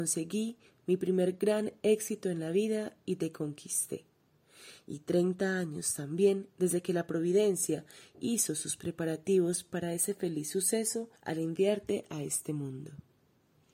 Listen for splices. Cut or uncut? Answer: cut